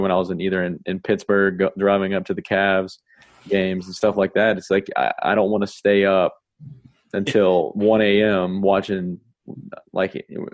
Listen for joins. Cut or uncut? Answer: uncut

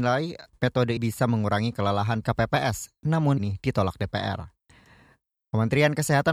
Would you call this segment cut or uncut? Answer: cut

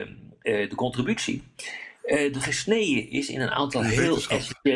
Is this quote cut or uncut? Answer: uncut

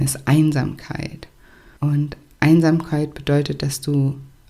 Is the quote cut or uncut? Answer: uncut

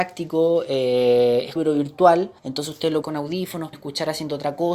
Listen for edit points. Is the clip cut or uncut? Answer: cut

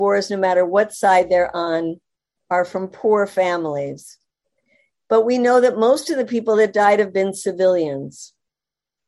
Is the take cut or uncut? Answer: uncut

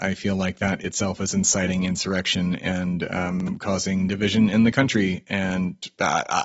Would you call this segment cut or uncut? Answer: uncut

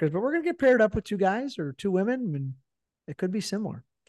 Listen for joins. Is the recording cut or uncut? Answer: uncut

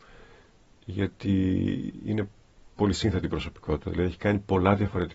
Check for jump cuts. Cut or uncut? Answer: uncut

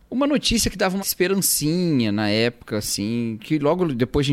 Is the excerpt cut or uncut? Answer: cut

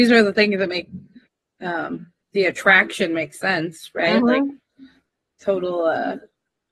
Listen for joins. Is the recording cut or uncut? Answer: uncut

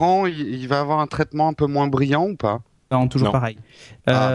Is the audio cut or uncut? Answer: uncut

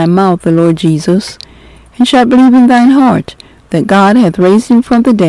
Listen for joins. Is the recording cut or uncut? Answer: uncut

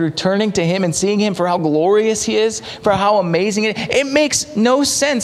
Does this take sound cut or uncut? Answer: uncut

